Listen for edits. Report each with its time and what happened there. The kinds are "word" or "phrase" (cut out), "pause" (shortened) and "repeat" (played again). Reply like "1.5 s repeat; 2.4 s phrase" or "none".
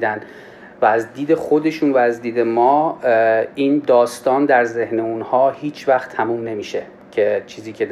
none